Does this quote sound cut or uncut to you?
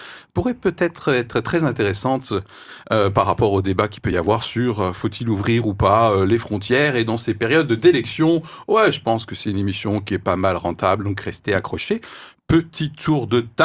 uncut